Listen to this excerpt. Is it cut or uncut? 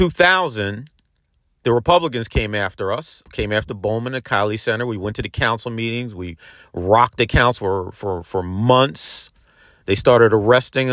cut